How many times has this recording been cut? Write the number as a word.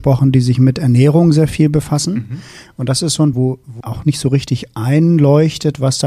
two